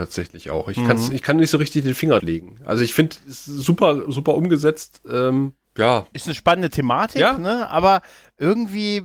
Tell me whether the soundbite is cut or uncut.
cut